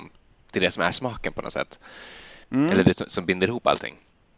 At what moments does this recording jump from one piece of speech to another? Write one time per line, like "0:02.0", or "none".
0:02.4